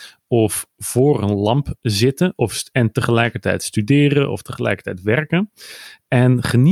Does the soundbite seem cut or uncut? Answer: uncut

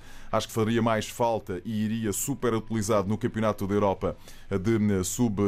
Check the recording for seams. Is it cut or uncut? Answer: cut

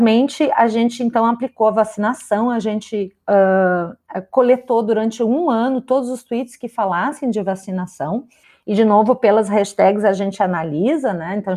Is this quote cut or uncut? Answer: uncut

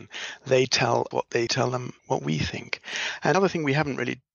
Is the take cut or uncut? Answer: cut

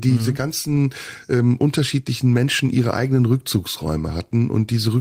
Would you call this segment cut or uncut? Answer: uncut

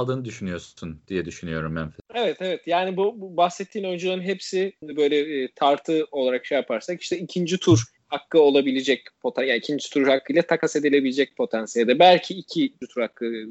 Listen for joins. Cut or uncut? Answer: uncut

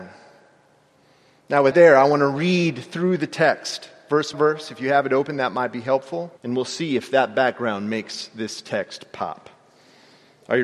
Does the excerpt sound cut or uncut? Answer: cut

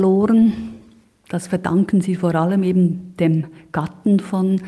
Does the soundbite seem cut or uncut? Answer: uncut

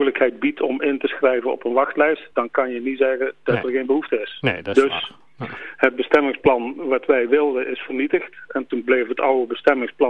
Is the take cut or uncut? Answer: uncut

